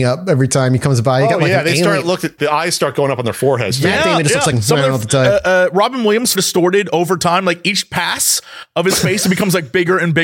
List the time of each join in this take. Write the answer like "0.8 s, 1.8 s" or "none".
2.4 s, 4.5 s, 6.3 s